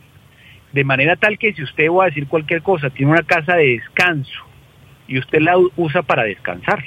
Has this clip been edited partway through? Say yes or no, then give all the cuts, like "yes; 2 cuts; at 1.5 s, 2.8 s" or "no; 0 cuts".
no; 0 cuts